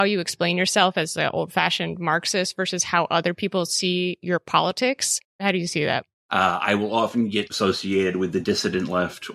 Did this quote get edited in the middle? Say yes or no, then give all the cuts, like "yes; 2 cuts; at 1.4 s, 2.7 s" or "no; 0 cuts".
yes; 1 cut; at 5.3 s